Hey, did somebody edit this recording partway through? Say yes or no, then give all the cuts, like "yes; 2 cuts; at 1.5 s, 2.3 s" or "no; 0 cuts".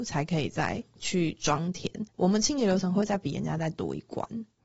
yes; 1 cut; at 2.1 s